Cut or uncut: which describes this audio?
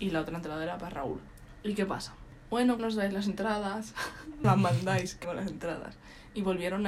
cut